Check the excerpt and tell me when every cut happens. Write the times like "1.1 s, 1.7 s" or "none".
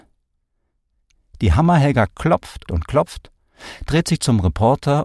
2.7 s